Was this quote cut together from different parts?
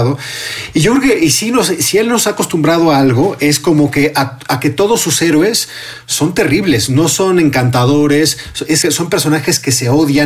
yes; 1 cut; at 8.8 s

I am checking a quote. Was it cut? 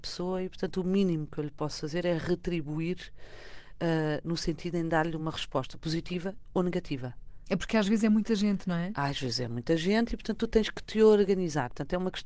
no; 0 cuts

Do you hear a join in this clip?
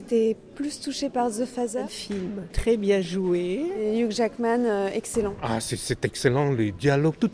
no; 0 cuts

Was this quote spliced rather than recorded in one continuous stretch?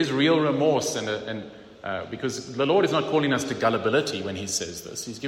no; 0 cuts

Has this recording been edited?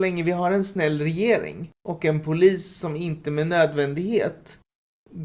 yes; 1 cut; at 1.8 s

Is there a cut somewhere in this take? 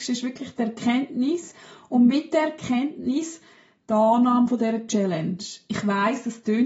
no; 0 cuts

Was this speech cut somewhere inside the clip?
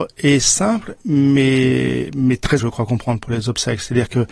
yes; 1 cut; at 2.6 s

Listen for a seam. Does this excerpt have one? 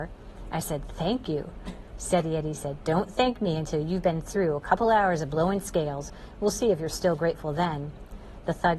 no; 0 cuts

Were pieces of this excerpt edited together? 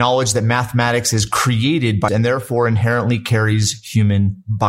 yes; 1 cut; at 2.1 s

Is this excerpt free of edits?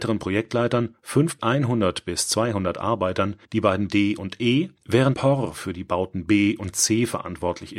no; 4 cuts; at 1.4 s, 3.4 s, 3.9 s, 5.1 s

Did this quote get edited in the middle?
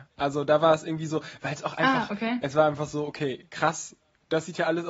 no; 0 cuts

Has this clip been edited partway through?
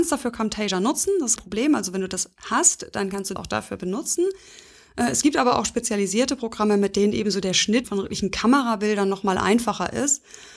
yes; 3 cuts; at 1.4 s, 3.4 s, 7.8 s

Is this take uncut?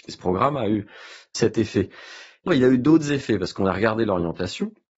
no; 1 cut; at 2.5 s

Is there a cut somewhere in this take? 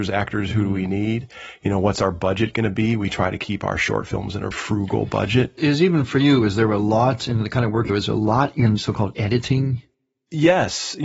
yes; 4 cuts; at 4.5 s, 5.6 s, 7.9 s, 8.8 s

